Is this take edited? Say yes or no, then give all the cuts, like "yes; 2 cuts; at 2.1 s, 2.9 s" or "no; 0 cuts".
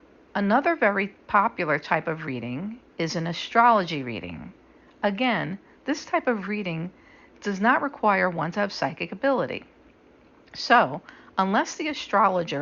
yes; 1 cut; at 2.9 s